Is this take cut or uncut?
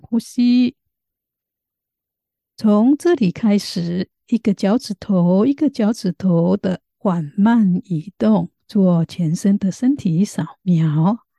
cut